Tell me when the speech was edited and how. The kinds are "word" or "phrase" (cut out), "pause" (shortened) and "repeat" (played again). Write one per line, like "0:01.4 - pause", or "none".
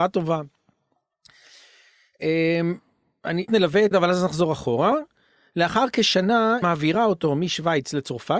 0:03.5 - phrase
0:03.9 - word
0:06.6 - word